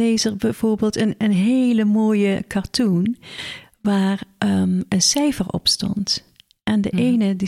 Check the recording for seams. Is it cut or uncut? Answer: uncut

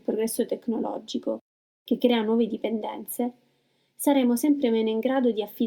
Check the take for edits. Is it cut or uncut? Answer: uncut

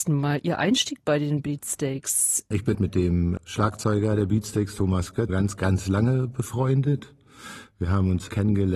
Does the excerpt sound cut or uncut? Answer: cut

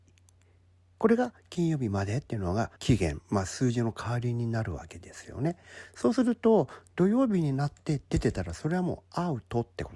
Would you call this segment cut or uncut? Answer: cut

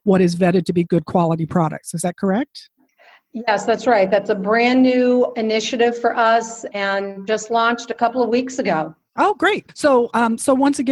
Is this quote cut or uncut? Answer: uncut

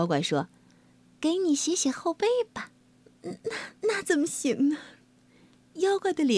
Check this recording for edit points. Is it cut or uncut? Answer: cut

